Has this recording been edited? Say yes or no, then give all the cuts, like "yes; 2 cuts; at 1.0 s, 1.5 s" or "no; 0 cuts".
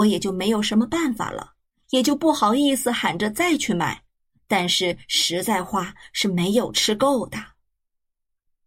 no; 0 cuts